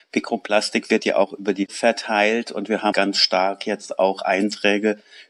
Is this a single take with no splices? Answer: no; 2 cuts; at 1.7 s, 2.9 s

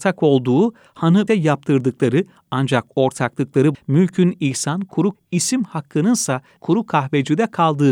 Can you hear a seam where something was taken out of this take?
yes; 4 cuts; at 1.3 s, 3.7 s, 5.1 s, 6.6 s

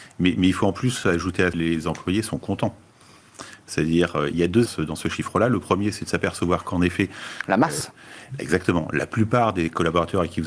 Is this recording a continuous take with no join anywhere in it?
no; 2 cuts; at 1.5 s, 4.7 s

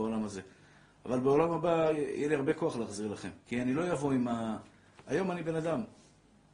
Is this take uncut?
no; 1 cut; at 3.4 s

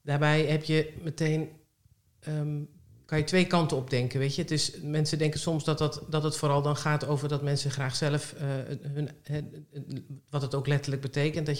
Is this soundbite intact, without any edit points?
yes; 0 cuts

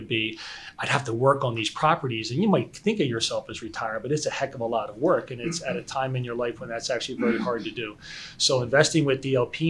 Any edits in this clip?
no; 0 cuts

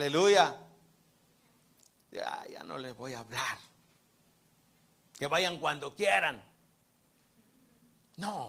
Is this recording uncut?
yes; 0 cuts

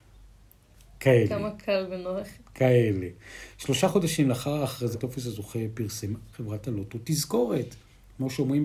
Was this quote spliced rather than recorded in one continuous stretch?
yes; 2 cuts; at 4.9 s, 6.3 s

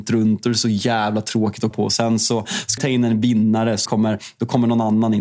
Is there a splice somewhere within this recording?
yes; 3 cuts; at 1.7 s, 2.8 s, 3.9 s

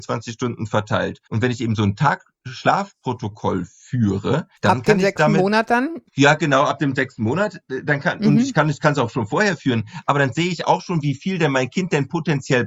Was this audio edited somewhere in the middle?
yes; 3 cuts; at 1.3 s, 4.6 s, 6.1 s

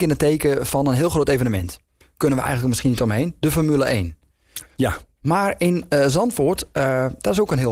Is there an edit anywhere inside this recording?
no; 0 cuts

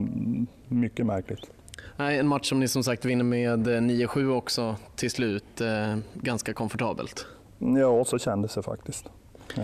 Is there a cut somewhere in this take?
no; 0 cuts

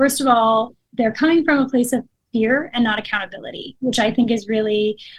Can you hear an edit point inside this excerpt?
no; 0 cuts

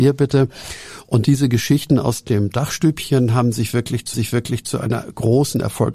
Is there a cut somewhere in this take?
yes; 1 cut; at 4.1 s

